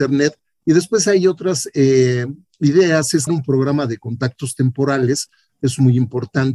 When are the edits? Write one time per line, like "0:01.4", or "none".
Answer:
0:03.3